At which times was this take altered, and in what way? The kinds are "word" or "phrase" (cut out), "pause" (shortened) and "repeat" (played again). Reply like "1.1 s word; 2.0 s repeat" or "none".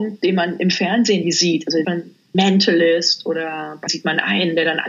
1.2 s word; 1.8 s word; 2.3 s word; 3.9 s word